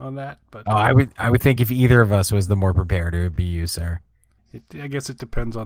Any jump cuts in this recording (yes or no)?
no